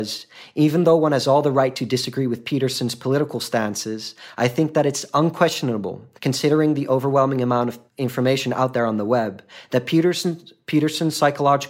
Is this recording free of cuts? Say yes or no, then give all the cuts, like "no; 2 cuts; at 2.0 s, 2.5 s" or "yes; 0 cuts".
no; 2 cuts; at 6.2 s, 7.9 s